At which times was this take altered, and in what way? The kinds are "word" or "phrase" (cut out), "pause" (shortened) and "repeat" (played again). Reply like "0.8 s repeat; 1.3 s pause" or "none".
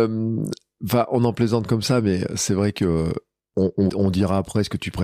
3.4 s pause; 3.9 s word